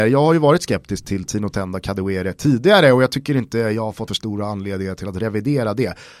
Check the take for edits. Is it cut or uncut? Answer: cut